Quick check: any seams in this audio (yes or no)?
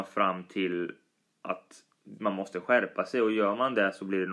no